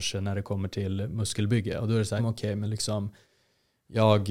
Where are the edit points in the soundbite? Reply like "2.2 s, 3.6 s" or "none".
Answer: 2.2 s